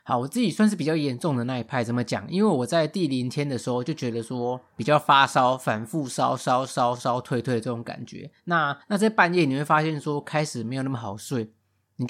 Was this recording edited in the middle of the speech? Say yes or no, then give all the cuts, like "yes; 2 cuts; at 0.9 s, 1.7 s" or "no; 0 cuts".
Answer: yes; 2 cuts; at 4.7 s, 8.8 s